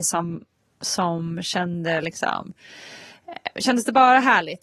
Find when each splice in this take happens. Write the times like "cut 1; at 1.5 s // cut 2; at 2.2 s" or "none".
none

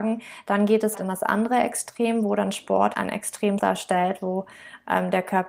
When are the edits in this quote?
cut 1; at 1.0 s // cut 2; at 2.9 s // cut 3; at 3.6 s

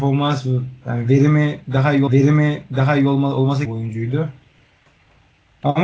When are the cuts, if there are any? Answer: cut 1; at 2.1 s // cut 2; at 3.6 s

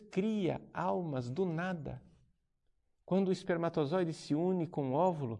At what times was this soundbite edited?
none

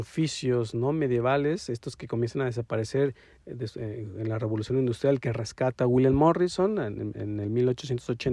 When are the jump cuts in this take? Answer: none

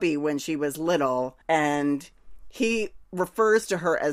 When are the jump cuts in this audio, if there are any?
cut 1; at 1.4 s // cut 2; at 3.0 s

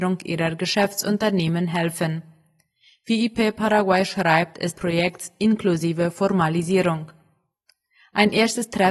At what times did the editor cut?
cut 1; at 4.7 s

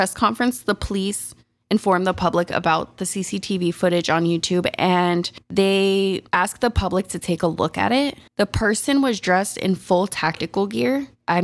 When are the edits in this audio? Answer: none

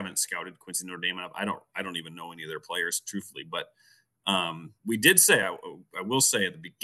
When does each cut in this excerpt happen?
none

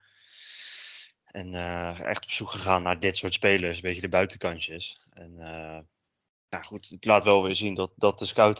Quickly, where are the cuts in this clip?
none

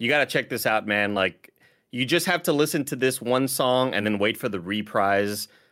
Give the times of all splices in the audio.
none

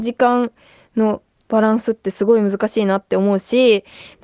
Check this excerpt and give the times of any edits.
cut 1; at 1.4 s

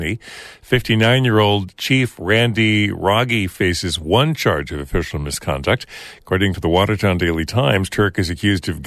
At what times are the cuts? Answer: none

